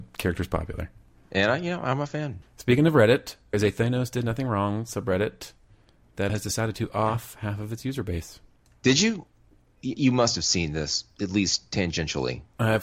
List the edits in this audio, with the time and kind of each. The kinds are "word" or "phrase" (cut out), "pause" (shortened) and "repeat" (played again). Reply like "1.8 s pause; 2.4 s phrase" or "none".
2.4 s word; 3.5 s word; 6.3 s word